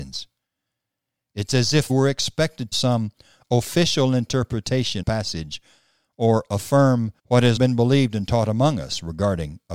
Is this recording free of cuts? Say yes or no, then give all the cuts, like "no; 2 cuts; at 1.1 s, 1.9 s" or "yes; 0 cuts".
no; 5 cuts; at 1.9 s, 2.7 s, 5.0 s, 7.2 s, 7.6 s